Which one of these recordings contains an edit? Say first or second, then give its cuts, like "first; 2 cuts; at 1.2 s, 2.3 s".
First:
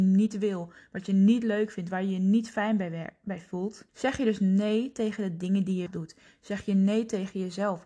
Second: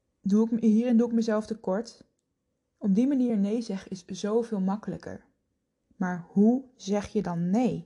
first; 2 cuts; at 3.9 s, 5.9 s